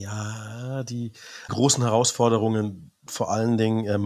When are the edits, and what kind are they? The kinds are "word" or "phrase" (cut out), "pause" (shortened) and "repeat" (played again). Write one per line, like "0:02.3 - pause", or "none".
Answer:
0:01.5 - phrase
0:03.1 - phrase

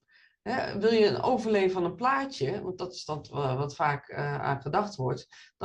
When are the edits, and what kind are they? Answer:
none

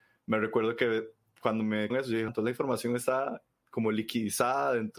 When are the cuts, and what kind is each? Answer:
0:01.9 - word
0:02.3 - word

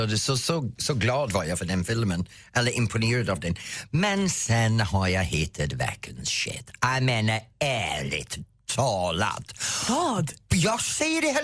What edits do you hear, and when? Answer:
none

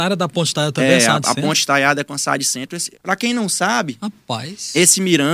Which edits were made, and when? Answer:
0:02.9 - pause

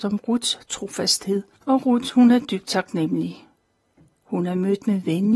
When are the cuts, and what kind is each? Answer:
0:01.5 - pause

